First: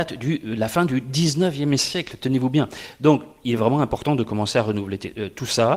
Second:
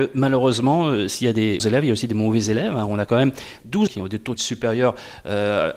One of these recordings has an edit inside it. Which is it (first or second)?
second